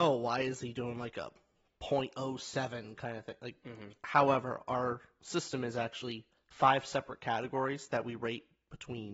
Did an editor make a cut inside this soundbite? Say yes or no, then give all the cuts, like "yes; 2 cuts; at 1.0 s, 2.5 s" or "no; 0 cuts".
no; 0 cuts